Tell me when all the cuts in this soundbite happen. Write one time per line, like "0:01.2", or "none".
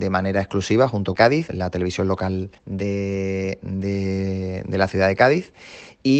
0:01.2
0:01.5
0:02.6

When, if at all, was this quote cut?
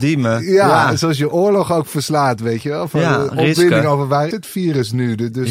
0:04.3

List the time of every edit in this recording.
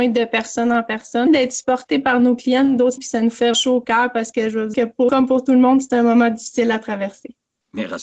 0:01.3
0:03.0
0:03.5
0:04.7
0:05.1

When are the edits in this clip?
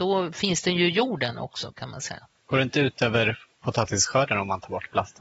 0:02.4

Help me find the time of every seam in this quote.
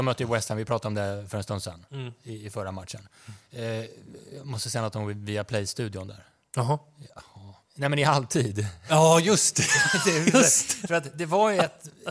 0:07.6

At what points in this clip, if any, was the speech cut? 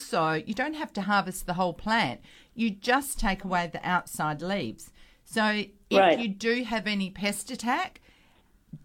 none

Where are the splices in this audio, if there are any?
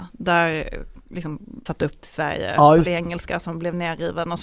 0:01.7
0:02.0
0:02.9

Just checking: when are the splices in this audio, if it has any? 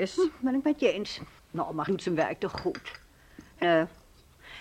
0:01.4
0:01.9
0:03.6

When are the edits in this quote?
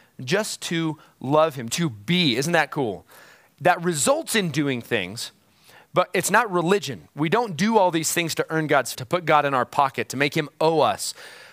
0:01.7
0:08.9

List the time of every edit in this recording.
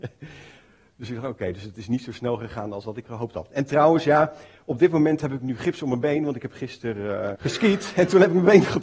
0:07.3

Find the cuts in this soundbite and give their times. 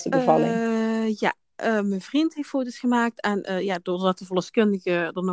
none

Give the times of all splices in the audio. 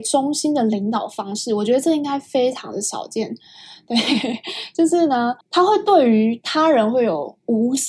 0:05.4

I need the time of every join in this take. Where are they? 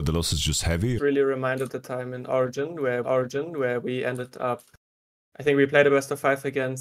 0:01.0
0:01.7
0:03.0

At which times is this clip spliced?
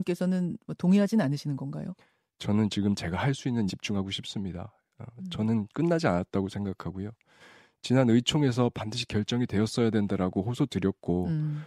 0:03.7

